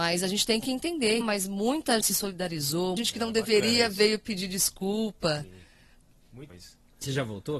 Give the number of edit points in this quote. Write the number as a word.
four